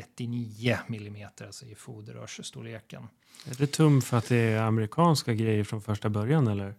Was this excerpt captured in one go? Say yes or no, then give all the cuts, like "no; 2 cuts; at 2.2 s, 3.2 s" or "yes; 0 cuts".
yes; 0 cuts